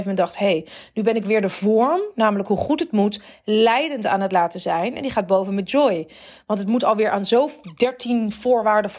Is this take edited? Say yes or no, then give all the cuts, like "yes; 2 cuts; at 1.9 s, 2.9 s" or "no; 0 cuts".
no; 0 cuts